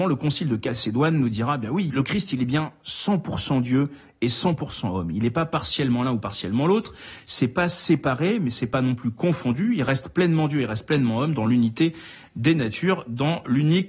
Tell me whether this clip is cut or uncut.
uncut